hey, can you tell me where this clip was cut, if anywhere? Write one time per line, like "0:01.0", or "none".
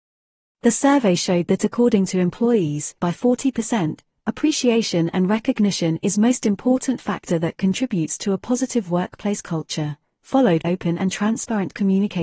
0:03.0
0:10.6

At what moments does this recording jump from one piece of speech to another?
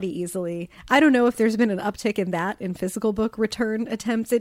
none

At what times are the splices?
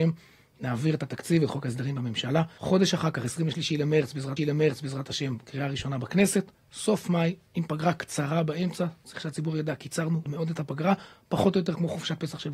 0:04.4
0:10.3

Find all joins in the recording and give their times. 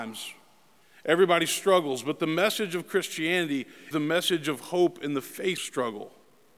0:03.9
0:05.6

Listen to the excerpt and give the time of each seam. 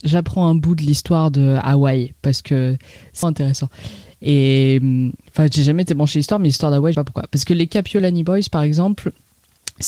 0:03.2
0:06.9

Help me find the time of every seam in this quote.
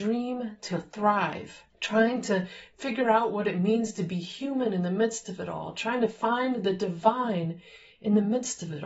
0:01.7

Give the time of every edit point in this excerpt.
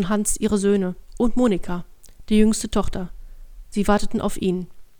0:03.7

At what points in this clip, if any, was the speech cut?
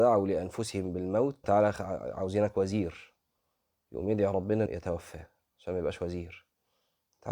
0:01.4
0:04.7

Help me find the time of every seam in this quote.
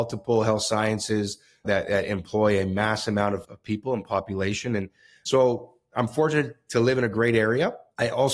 0:03.4

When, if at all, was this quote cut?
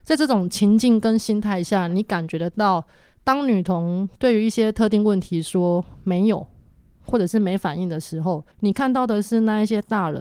0:08.5

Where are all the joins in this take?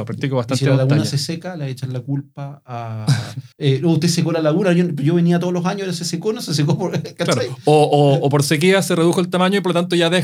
0:03.5

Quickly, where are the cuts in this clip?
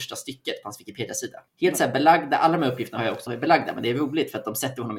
0:01.5
0:03.3

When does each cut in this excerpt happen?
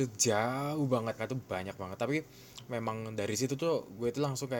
0:01.2

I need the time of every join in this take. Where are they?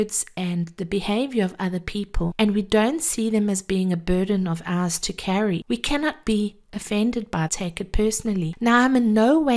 0:07.5

